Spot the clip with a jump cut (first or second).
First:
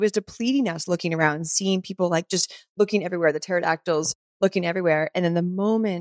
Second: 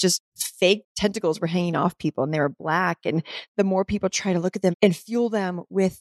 second